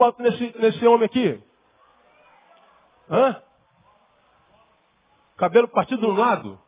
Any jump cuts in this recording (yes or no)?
no